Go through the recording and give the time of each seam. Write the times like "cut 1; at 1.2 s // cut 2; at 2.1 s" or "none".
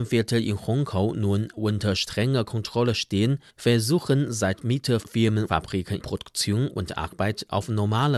cut 1; at 3.5 s // cut 2; at 5.0 s // cut 3; at 5.5 s // cut 4; at 6.0 s